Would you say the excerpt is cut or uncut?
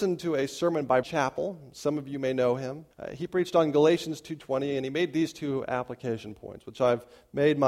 cut